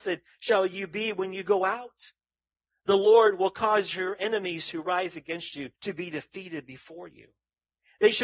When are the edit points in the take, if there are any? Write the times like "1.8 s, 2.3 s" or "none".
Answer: 5.8 s